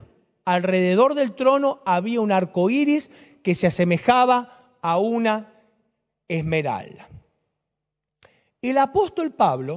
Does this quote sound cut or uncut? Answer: uncut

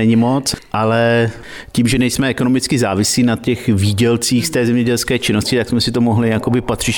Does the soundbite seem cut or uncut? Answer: uncut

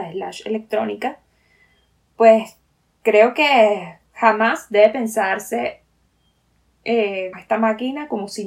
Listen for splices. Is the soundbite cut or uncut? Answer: cut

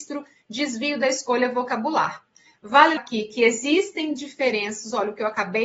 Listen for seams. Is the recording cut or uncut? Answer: cut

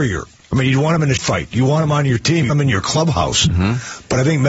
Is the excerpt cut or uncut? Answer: cut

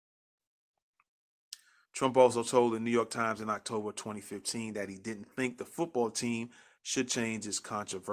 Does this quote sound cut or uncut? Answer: uncut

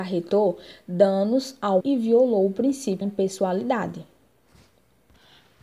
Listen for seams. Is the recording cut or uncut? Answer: cut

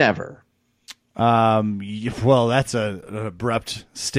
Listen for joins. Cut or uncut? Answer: uncut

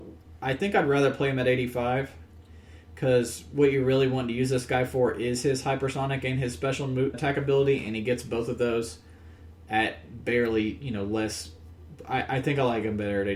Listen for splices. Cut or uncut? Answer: cut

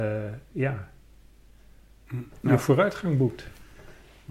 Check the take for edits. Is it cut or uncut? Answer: cut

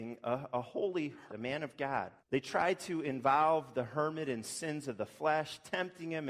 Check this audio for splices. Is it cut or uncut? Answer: cut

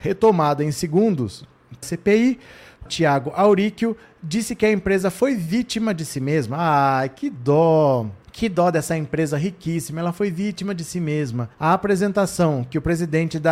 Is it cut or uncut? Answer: cut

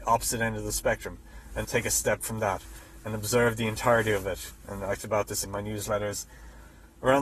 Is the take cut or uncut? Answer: cut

